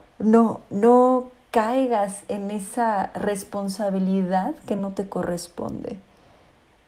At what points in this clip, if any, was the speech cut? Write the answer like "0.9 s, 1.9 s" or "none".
none

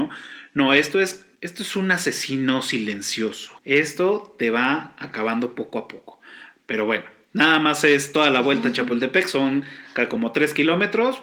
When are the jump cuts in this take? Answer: 1.4 s, 3.6 s, 7.2 s

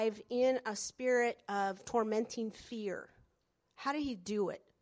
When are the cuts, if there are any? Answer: none

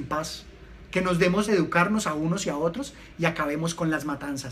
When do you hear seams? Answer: 1.5 s

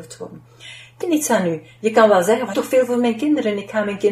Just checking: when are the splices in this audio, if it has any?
1.0 s, 2.5 s

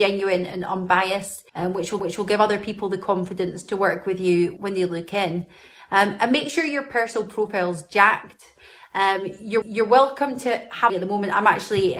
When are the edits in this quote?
1.5 s, 2.0 s, 4.6 s, 9.6 s, 10.9 s

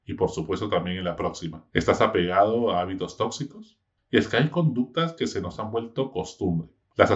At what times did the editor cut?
1.7 s

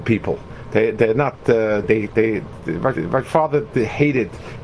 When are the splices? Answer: 1.8 s, 3.0 s

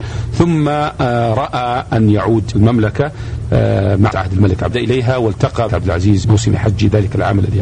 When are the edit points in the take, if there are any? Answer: 2.5 s, 4.1 s, 4.7 s, 5.7 s, 6.2 s

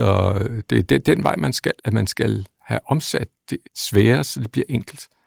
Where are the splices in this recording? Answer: 1.8 s, 3.6 s

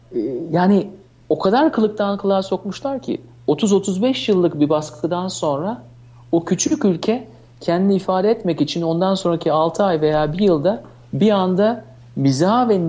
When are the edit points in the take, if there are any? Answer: none

